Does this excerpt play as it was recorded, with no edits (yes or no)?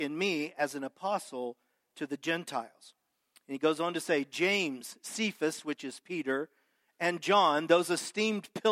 yes